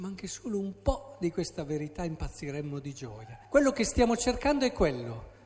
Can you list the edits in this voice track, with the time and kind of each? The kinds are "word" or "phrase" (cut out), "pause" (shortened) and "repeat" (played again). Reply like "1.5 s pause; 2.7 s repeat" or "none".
3.4 s pause